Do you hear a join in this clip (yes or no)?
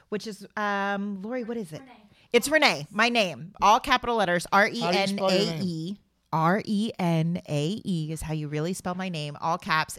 no